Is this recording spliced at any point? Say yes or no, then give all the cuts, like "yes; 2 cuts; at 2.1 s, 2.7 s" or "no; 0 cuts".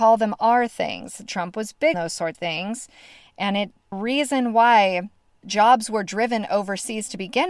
yes; 4 cuts; at 1.9 s, 2.3 s, 3.9 s, 5.4 s